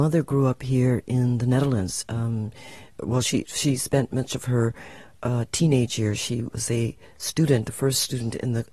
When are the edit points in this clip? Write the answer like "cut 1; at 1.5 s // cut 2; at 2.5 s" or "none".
none